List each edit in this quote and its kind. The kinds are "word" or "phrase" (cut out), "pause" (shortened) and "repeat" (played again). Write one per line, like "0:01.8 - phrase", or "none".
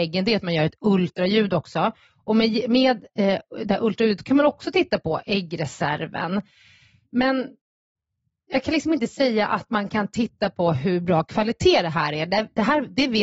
none

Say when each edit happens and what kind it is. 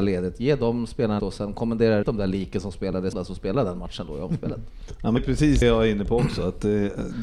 0:01.2 - word
0:02.0 - word
0:03.1 - word
0:05.2 - word
0:05.6 - word

